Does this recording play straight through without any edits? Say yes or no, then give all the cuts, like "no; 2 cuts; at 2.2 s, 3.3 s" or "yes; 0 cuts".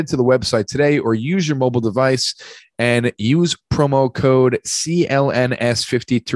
yes; 0 cuts